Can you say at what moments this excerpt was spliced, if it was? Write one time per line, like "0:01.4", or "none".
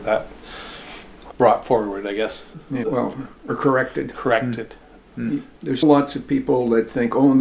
0:01.3
0:02.8
0:05.8